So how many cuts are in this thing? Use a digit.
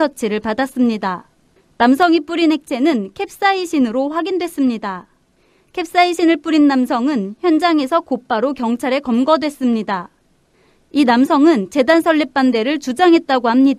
0